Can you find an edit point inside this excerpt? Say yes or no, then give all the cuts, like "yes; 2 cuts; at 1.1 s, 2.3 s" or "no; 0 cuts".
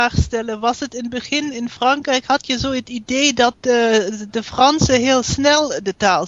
no; 0 cuts